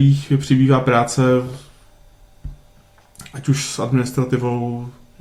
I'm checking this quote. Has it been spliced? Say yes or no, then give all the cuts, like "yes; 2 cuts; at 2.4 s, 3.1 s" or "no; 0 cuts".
no; 0 cuts